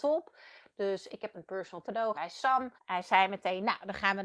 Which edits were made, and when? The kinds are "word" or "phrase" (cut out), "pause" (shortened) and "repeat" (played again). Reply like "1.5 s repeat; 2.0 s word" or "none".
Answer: 1.3 s word; 1.8 s word; 2.1 s word; 2.8 s pause

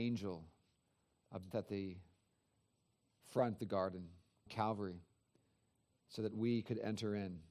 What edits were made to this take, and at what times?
1.5 s word; 3.6 s word; 4.5 s word

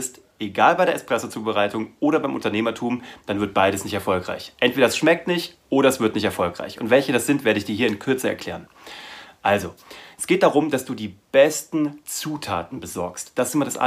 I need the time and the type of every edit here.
none

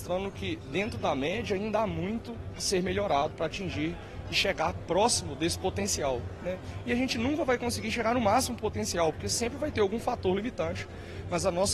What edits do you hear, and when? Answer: 3.3 s word

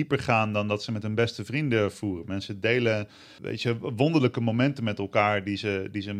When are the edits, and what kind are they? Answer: 3.4 s word

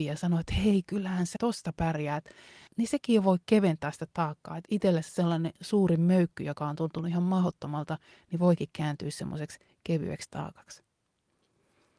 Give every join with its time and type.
1.4 s word; 2.7 s word

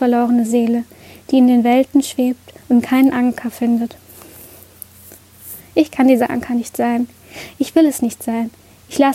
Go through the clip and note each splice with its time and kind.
2.6 s pause

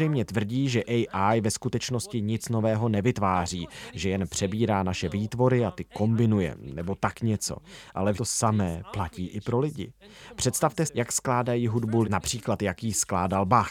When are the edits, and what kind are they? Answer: 8.1 s word; 10.9 s word; 12.0 s word

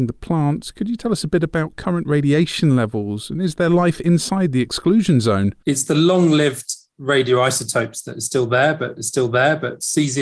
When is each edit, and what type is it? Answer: 9.0 s repeat

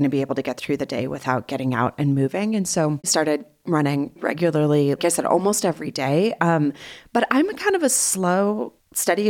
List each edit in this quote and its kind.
3.0 s phrase; 4.2 s word; 5.0 s word

